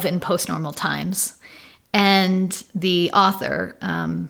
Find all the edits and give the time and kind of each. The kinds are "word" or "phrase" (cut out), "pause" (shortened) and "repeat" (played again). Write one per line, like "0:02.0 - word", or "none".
none